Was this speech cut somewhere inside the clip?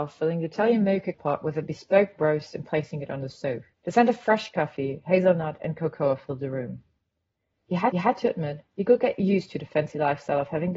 yes; 4 cuts; at 1.1 s, 3.7 s, 7.9 s, 8.7 s

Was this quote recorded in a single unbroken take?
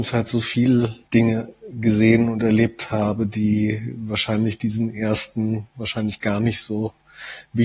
no; 1 cut; at 1.0 s

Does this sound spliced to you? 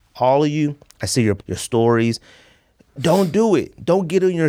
yes; 1 cut; at 1.4 s

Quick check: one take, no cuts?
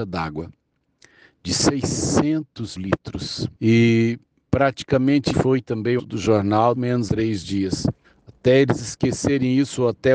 no; 7 cuts; at 2.8 s, 3.5 s, 5.3 s, 6.0 s, 6.8 s, 7.1 s, 8.0 s

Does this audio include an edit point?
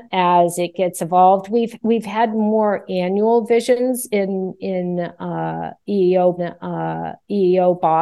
yes; 1 cut; at 6.4 s

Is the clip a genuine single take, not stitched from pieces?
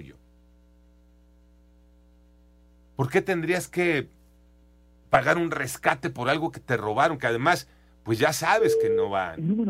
yes; 0 cuts

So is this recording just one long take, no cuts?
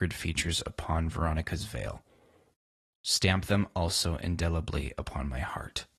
yes; 0 cuts

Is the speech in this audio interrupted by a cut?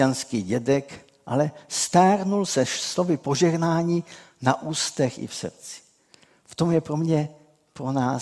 no; 0 cuts

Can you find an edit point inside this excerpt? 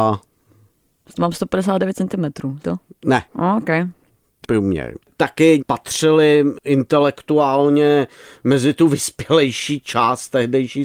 yes; 4 cuts; at 2.6 s, 3.3 s, 4.4 s, 5.6 s

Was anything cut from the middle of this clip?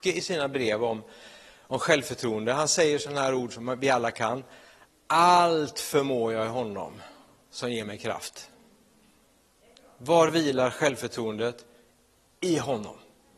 no; 0 cuts

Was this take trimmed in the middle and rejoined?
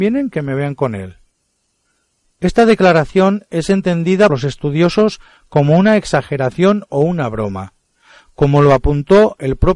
yes; 1 cut; at 4.3 s

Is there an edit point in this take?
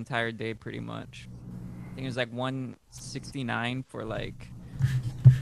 no; 0 cuts

